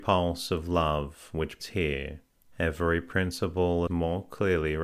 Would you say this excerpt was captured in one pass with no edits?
no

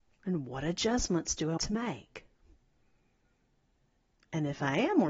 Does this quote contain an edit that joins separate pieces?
yes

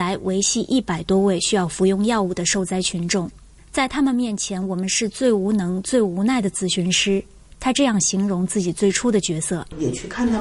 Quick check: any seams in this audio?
no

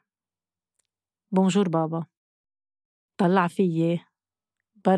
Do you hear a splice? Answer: no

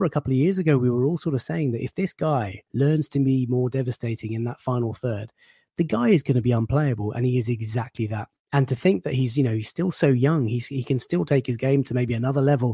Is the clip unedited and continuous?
no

